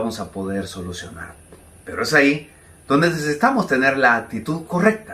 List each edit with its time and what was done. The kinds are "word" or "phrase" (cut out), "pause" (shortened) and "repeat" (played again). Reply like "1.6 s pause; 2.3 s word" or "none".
none

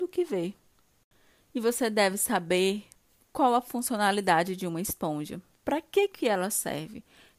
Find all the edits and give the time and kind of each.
none

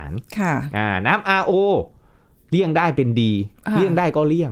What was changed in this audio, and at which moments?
none

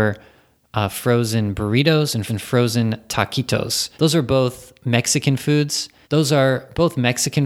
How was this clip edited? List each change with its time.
2.3 s repeat; 3.9 s pause; 6.0 s pause

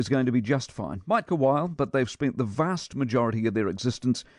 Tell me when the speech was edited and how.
1.3 s word

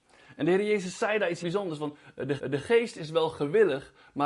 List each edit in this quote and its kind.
1.4 s word; 2.4 s repeat

